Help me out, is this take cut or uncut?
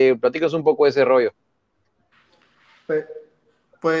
uncut